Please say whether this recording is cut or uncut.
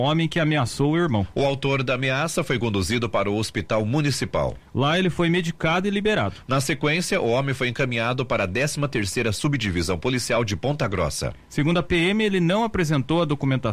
uncut